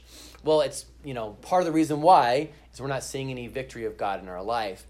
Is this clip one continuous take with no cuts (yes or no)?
yes